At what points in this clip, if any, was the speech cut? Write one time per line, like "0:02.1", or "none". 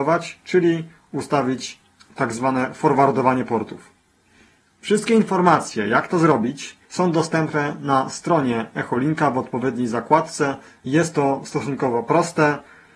0:06.8